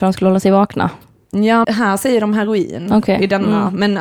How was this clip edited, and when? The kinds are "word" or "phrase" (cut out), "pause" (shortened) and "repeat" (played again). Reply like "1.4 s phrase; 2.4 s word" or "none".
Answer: 1.6 s word